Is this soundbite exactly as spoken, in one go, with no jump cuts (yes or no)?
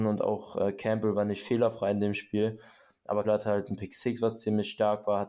no